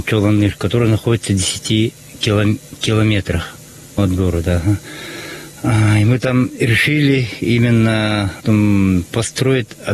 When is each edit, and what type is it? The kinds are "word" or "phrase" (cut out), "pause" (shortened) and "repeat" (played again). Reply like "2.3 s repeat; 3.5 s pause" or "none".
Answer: 4.0 s word; 8.4 s word